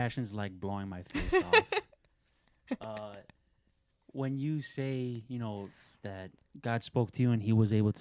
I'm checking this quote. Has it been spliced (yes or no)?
no